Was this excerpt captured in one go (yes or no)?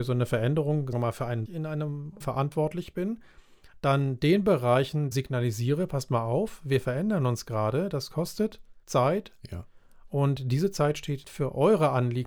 no